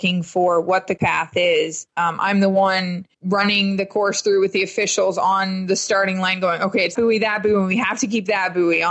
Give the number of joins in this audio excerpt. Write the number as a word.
four